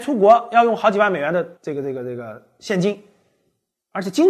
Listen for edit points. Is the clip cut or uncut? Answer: cut